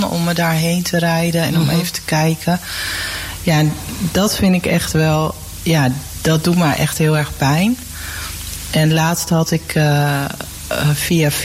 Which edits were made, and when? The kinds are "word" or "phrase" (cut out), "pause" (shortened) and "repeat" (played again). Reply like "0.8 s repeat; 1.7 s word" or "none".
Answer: none